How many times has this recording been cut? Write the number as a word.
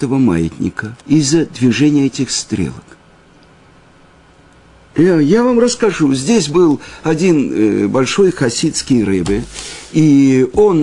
one